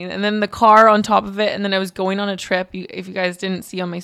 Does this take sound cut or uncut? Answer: uncut